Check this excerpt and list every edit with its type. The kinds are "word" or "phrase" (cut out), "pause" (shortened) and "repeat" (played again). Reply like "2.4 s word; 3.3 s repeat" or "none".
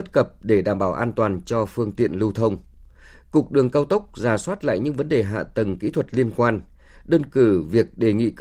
none

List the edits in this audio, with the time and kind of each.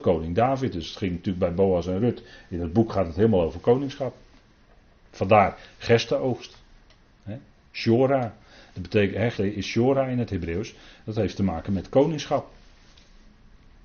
9.3 s word

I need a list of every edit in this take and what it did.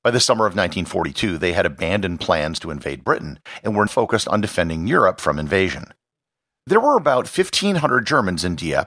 3.9 s word

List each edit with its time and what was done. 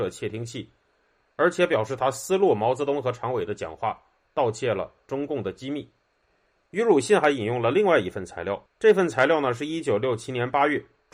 8.7 s pause

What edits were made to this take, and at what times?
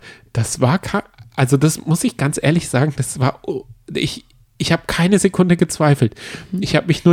none

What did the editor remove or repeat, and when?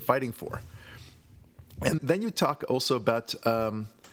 2.0 s word

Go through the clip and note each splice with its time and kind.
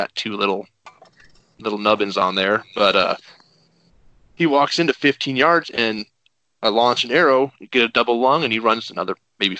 none

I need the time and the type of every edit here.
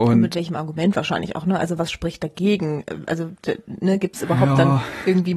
none

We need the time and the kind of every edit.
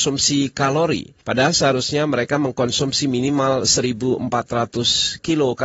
1.2 s pause

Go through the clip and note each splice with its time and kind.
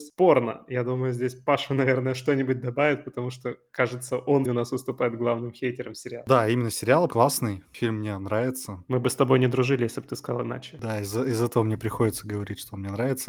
4.4 s word; 7.1 s phrase

